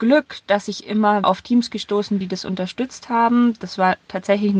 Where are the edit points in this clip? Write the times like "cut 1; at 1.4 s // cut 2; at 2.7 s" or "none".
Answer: cut 1; at 1.2 s // cut 2; at 2.2 s

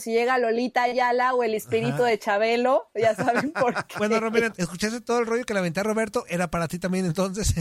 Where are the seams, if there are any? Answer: cut 1; at 4.5 s

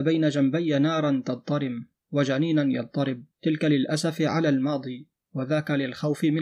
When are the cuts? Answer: cut 1; at 3.3 s

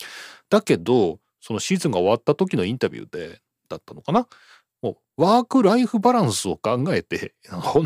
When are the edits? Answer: none

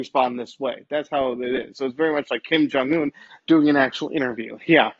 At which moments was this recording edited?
none

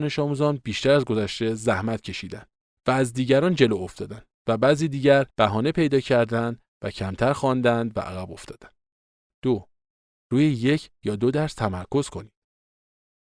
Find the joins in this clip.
cut 1; at 5.3 s

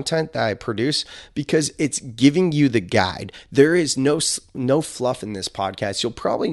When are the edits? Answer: none

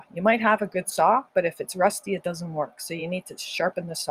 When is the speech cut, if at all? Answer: none

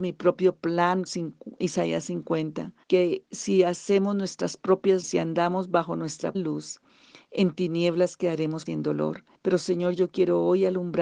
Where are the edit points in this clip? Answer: cut 1; at 1.1 s // cut 2; at 2.8 s // cut 3; at 5.0 s // cut 4; at 6.3 s // cut 5; at 8.7 s // cut 6; at 9.3 s

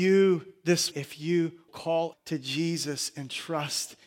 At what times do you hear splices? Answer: cut 1; at 0.9 s // cut 2; at 1.7 s // cut 3; at 2.1 s

